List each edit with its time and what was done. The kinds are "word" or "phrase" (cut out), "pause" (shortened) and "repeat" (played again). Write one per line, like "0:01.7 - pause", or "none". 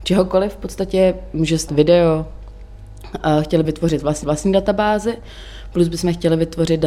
0:01.7 - phrase
0:03.6 - word
0:04.2 - repeat